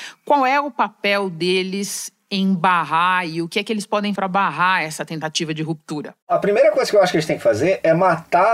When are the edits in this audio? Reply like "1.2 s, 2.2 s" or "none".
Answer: 4.2 s, 6.2 s